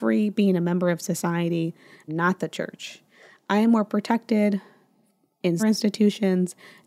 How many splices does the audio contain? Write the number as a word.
two